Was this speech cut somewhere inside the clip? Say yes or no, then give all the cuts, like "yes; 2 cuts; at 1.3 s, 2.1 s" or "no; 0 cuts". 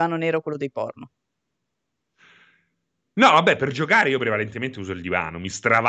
no; 0 cuts